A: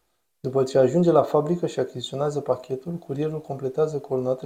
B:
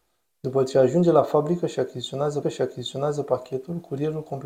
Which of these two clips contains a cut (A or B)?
B